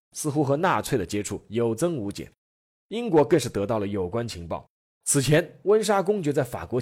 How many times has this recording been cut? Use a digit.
0